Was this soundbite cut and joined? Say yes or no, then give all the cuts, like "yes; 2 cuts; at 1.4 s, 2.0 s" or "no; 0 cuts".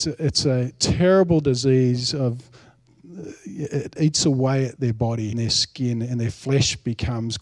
yes; 3 cuts; at 4.0 s, 4.8 s, 5.3 s